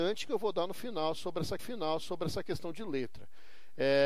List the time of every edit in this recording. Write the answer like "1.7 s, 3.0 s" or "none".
1.6 s